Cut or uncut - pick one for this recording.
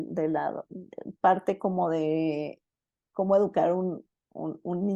uncut